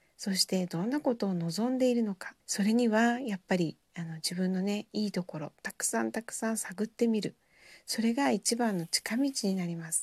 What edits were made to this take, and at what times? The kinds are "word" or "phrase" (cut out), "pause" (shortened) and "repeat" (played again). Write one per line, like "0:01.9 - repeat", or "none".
0:02.4 - pause